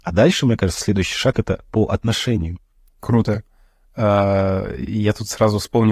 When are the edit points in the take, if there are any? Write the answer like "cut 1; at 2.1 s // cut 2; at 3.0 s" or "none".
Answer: none